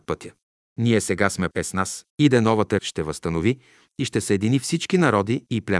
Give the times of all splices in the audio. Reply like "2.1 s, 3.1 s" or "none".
1.5 s, 2.1 s, 2.8 s